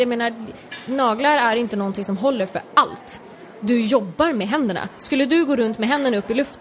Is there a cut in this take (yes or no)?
no